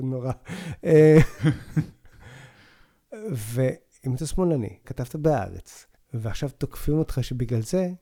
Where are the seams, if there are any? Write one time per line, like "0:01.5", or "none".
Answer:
0:04.8
0:06.0